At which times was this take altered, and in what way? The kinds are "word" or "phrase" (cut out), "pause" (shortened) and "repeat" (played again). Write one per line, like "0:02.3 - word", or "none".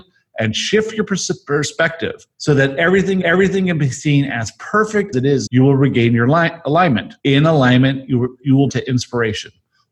0:02.3 - pause
0:03.2 - repeat
0:05.1 - word
0:05.5 - word
0:07.2 - pause
0:08.7 - phrase

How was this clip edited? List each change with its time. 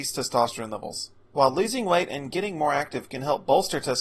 0:01.2 - pause

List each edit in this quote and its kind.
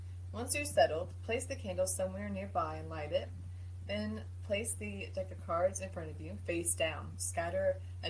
none

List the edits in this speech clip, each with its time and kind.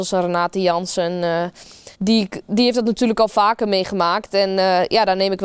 0:01.9 - pause

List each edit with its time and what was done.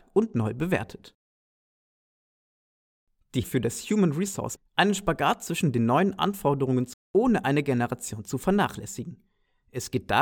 0:03.4 - word
0:04.6 - phrase
0:06.9 - word

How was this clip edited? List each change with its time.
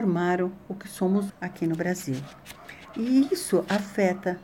0:01.3 - word

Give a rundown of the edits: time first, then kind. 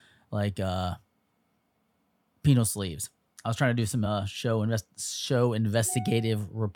none

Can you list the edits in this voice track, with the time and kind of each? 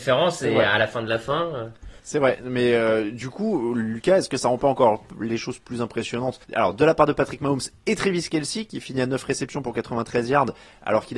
0:02.0 - pause
0:06.4 - pause

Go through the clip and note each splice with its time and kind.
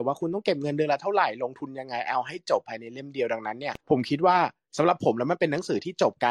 0:03.8 - pause

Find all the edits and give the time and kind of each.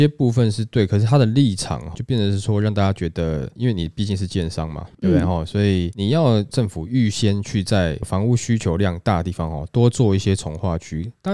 0:01.9 - word

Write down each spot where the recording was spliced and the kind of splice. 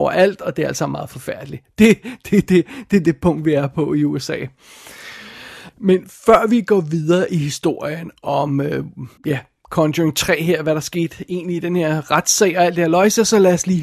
0:09.2 - pause

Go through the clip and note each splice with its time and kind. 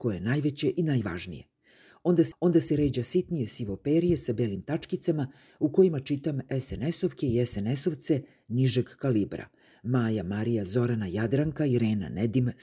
0:02.3 - repeat

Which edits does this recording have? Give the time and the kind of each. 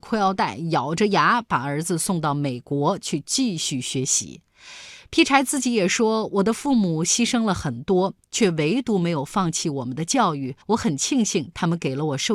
0:10.6 - pause

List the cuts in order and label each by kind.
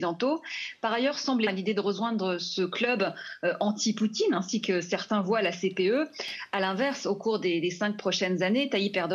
0:01.5 - word

